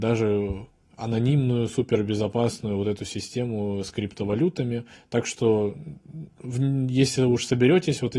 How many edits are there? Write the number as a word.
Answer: one